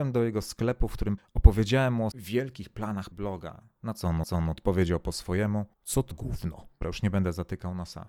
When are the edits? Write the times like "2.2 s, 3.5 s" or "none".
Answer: 1.2 s, 2.1 s, 3.1 s, 4.2 s, 5.7 s, 6.1 s, 6.8 s